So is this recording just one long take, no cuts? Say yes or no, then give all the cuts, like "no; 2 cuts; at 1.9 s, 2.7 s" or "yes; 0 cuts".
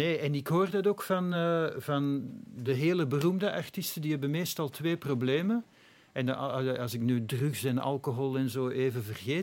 yes; 0 cuts